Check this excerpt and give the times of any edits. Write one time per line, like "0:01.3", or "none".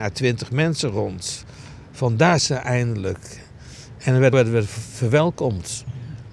0:02.4
0:04.3